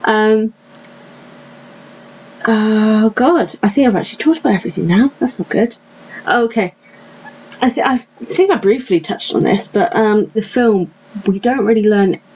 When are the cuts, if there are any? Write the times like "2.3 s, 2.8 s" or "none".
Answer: 10.3 s